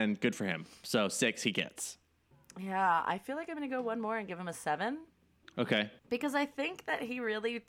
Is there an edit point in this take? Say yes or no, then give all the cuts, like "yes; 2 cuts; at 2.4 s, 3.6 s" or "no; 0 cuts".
yes; 2 cuts; at 2.3 s, 6.0 s